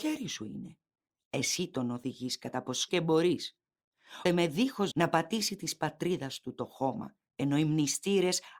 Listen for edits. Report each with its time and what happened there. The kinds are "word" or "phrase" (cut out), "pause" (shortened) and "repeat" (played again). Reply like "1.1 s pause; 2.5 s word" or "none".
2.9 s word; 4.3 s word; 4.9 s word; 7.3 s pause